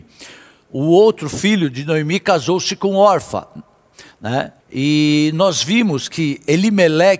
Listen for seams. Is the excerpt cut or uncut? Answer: cut